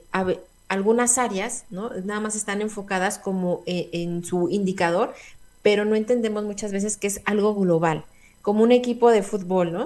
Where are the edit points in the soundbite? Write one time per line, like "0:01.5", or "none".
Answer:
none